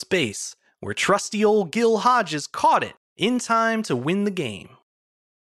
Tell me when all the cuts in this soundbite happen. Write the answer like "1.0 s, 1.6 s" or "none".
none